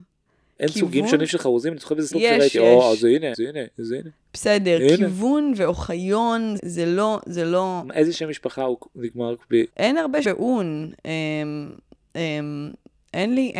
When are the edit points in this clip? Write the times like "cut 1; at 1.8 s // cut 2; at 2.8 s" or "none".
cut 1; at 2.1 s // cut 2; at 3.3 s // cut 3; at 6.6 s // cut 4; at 9.7 s // cut 5; at 10.2 s